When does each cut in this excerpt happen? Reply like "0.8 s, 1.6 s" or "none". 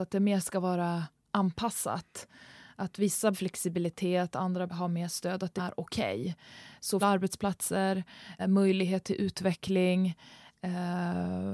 3.3 s, 4.7 s, 5.6 s, 7.0 s, 8.4 s